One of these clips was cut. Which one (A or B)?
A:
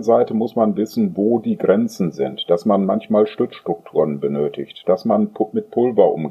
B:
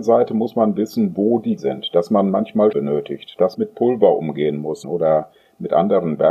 B